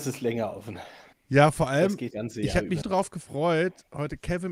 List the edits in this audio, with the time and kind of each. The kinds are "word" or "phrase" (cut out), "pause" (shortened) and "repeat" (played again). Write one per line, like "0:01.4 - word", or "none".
0:01.1 - pause
0:02.1 - phrase
0:02.8 - word